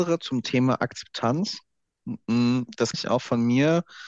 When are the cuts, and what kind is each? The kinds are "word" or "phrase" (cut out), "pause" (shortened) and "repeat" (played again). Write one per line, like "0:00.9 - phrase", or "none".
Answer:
0:02.9 - word